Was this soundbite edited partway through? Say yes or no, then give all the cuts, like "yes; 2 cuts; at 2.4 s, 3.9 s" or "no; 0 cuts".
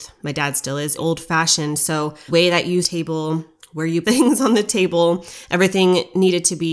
yes; 4 cuts; at 1.0 s, 2.3 s, 2.8 s, 4.0 s